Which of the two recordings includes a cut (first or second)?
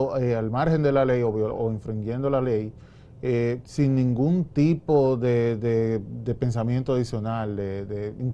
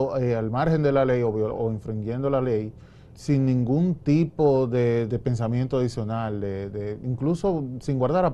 second